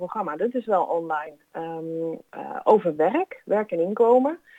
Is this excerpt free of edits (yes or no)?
yes